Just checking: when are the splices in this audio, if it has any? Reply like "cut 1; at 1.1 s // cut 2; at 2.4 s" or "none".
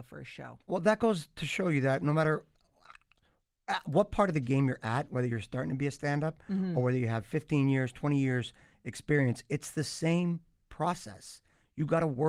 none